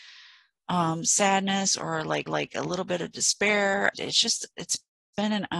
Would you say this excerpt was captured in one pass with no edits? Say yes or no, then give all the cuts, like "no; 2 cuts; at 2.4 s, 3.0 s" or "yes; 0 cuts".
no; 2 cuts; at 2.3 s, 3.9 s